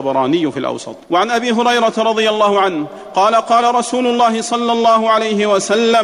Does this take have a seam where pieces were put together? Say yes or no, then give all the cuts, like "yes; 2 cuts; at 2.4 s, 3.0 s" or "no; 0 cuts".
yes; 1 cut; at 1.0 s